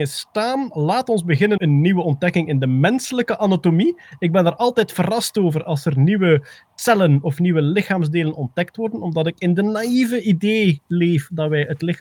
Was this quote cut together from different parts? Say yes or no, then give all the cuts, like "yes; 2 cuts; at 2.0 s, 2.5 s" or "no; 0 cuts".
yes; 1 cut; at 1.6 s